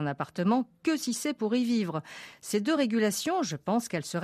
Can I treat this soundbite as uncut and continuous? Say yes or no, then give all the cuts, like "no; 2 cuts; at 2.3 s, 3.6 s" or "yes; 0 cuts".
yes; 0 cuts